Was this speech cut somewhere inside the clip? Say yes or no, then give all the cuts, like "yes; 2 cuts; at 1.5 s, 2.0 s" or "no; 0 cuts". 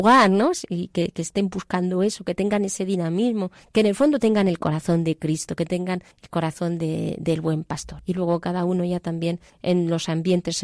no; 0 cuts